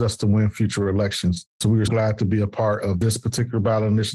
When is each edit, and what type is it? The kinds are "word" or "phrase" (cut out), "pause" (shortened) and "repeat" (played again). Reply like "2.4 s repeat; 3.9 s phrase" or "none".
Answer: 1.5 s pause; 1.9 s word